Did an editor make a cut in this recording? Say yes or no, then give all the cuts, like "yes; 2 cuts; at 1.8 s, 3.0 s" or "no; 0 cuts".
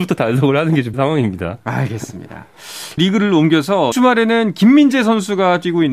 yes; 3 cuts; at 0.9 s, 3.0 s, 3.9 s